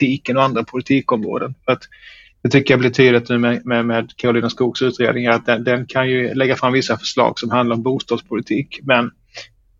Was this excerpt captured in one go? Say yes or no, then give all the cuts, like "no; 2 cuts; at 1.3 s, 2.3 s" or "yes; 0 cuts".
yes; 0 cuts